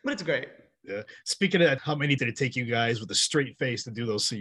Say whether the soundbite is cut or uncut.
cut